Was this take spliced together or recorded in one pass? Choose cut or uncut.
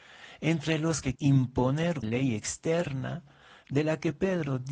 cut